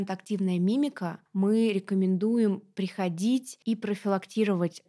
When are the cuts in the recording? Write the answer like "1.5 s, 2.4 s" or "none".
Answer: 1.3 s, 3.6 s